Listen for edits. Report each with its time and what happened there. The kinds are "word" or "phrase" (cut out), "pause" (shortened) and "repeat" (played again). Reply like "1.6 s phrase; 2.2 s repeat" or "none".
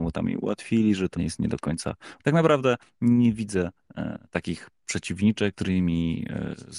1.2 s word; 2.2 s word; 4.2 s pause; 5.5 s word